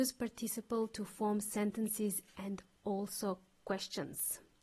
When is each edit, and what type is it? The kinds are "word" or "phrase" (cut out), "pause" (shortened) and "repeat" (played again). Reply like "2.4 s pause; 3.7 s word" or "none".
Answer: none

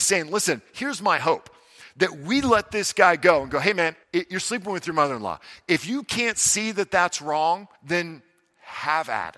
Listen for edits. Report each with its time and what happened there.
4.0 s pause; 7.8 s pause

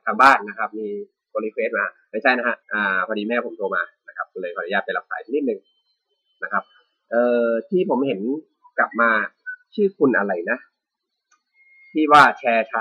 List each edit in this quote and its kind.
2.6 s pause

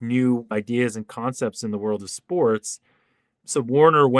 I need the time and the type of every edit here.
none

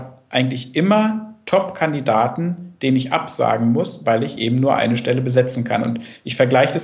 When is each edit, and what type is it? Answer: none

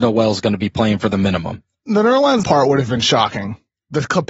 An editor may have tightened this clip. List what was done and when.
2.4 s word

